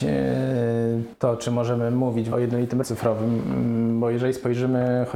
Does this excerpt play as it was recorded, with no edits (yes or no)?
no